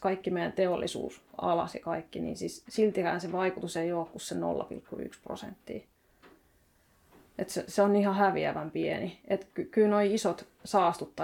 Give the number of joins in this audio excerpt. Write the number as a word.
zero